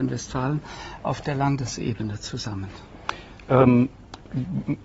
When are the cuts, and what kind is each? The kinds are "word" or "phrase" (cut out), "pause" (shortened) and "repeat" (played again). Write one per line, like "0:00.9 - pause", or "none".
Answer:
none